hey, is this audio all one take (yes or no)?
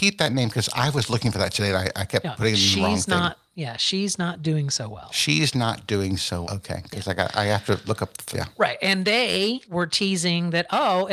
no